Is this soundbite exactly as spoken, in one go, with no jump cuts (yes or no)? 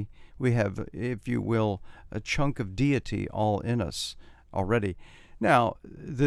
yes